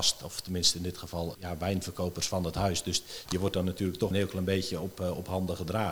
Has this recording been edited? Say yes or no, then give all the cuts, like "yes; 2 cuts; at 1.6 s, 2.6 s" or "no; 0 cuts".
yes; 2 cuts; at 1.3 s, 4.1 s